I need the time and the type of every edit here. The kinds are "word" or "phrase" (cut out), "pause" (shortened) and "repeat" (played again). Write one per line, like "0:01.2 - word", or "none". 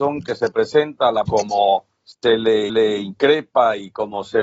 0:01.2 - word
0:02.0 - pause
0:02.7 - repeat